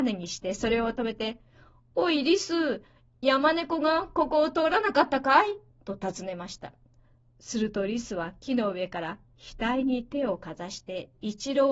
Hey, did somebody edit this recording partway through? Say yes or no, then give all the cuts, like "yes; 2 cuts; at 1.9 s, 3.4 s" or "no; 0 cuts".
no; 0 cuts